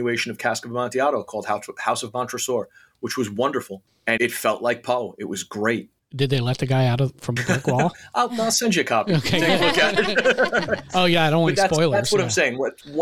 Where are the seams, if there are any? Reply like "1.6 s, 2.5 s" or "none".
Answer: 4.2 s, 7.4 s